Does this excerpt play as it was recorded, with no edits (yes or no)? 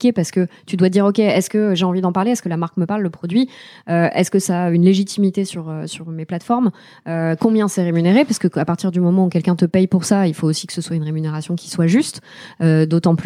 yes